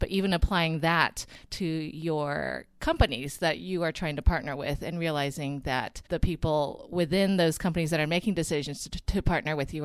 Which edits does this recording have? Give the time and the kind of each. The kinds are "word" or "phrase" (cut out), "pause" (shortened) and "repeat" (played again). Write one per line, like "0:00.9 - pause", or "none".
0:06.1 - pause